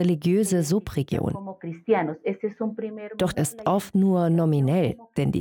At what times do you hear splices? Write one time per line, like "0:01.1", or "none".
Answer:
0:03.3